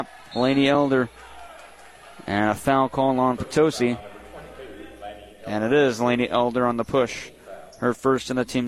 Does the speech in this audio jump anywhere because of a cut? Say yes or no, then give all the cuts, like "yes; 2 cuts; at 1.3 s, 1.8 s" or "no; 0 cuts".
no; 0 cuts